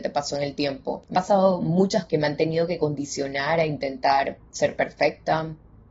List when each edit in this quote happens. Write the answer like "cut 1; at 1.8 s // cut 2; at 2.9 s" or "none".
cut 1; at 1.1 s // cut 2; at 2.1 s // cut 3; at 4.5 s